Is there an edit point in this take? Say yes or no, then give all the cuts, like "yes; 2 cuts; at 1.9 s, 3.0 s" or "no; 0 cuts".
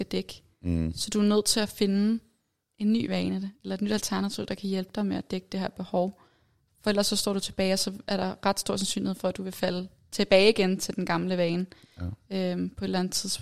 no; 0 cuts